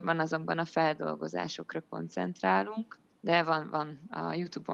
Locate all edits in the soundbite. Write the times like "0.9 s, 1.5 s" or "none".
3.1 s